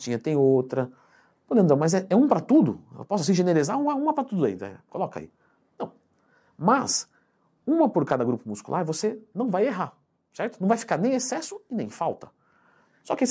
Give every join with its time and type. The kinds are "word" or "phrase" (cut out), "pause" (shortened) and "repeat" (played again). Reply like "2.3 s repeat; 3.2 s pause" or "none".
none